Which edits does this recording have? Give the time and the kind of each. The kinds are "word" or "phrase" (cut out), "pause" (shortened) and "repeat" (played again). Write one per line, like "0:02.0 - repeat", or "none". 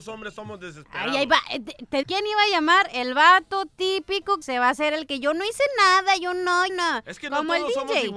0:02.0 - word
0:04.4 - word
0:06.7 - word